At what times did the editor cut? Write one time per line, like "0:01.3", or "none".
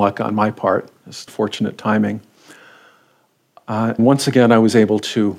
0:01.3
0:04.0

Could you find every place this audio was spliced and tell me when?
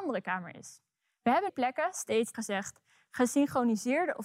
0:01.5
0:02.3

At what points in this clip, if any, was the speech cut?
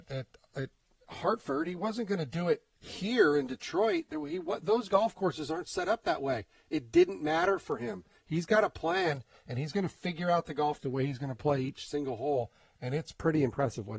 0:10.8

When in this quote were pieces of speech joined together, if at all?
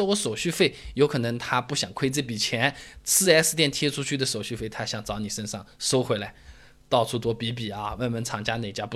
none

